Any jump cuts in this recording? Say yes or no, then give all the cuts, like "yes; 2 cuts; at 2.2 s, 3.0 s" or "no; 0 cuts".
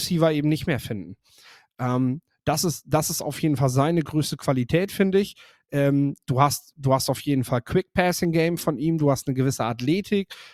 no; 0 cuts